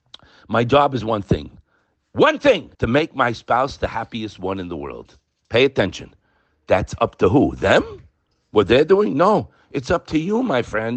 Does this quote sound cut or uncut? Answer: cut